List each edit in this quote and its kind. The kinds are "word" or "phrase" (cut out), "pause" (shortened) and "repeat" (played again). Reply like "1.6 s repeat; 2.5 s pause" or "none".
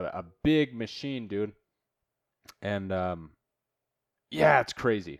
none